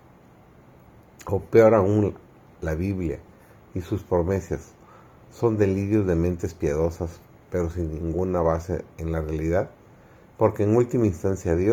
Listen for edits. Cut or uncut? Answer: uncut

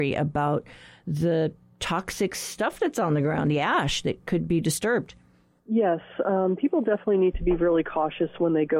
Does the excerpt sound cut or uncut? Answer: uncut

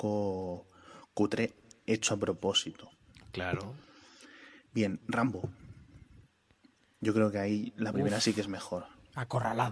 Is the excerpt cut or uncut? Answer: uncut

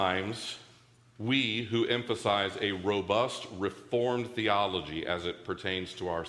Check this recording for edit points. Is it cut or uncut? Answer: uncut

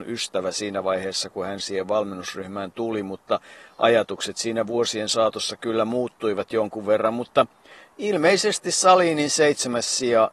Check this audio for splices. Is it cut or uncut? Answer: uncut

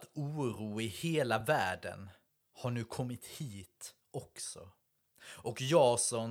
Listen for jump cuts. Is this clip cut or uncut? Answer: uncut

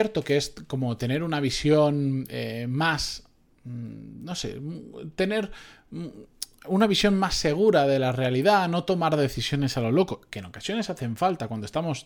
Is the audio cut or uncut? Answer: uncut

